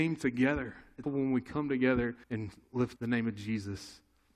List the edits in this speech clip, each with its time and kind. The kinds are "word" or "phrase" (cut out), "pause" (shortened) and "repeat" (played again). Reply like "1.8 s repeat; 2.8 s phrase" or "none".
1.0 s word; 2.2 s pause; 3.0 s word